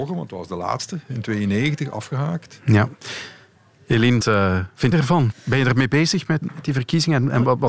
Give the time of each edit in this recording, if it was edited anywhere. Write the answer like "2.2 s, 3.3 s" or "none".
4.2 s, 4.9 s, 5.3 s, 6.4 s